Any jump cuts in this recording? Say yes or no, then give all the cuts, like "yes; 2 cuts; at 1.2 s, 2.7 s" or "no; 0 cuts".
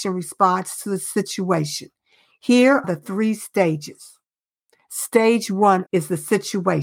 yes; 2 cuts; at 2.8 s, 5.9 s